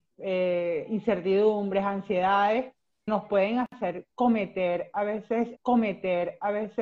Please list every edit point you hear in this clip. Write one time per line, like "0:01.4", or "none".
0:03.1
0:05.6